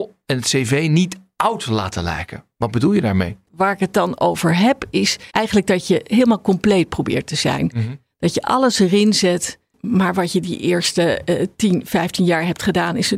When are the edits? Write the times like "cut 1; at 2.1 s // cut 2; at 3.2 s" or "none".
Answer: cut 1; at 5.3 s

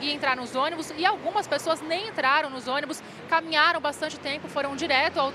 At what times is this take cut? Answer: none

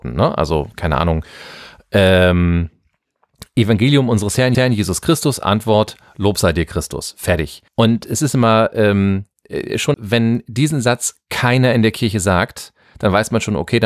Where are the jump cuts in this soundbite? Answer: cut 1; at 4.5 s // cut 2; at 7.7 s // cut 3; at 9.9 s

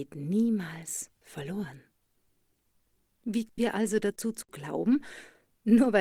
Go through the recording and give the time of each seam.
cut 1; at 3.6 s

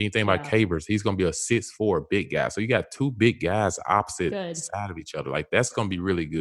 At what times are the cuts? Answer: none

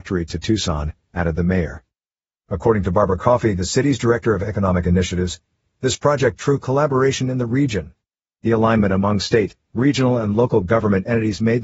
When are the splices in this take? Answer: cut 1; at 6.4 s

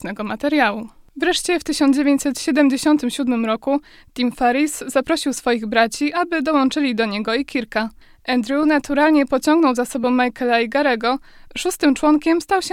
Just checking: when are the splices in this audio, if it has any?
none

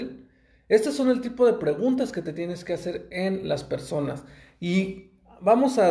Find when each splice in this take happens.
none

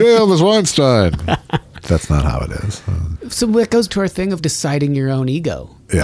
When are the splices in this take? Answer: cut 1; at 1.7 s // cut 2; at 3.1 s // cut 3; at 3.9 s // cut 4; at 4.4 s

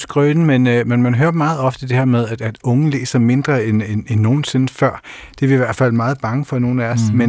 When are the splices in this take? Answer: none

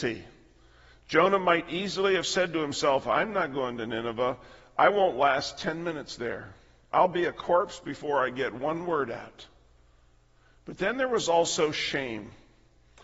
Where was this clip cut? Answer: none

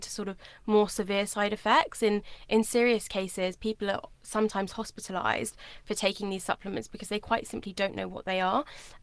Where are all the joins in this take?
none

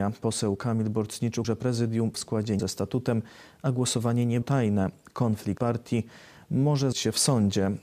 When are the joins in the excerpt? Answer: cut 1; at 1.4 s // cut 2; at 2.1 s // cut 3; at 2.6 s // cut 4; at 4.4 s // cut 5; at 5.6 s // cut 6; at 6.9 s

